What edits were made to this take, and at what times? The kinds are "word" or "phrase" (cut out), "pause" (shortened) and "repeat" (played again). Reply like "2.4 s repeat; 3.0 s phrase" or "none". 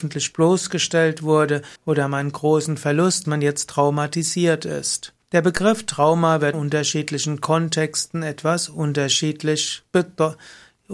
1.8 s pause; 3.2 s phrase; 5.2 s pause; 6.5 s phrase